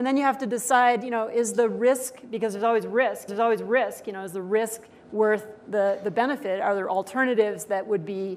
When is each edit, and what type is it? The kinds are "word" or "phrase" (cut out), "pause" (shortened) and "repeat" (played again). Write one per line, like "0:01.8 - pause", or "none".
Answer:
0:03.3 - repeat